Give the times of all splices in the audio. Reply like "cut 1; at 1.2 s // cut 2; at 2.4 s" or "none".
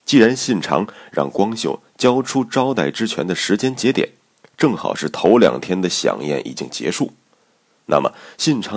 none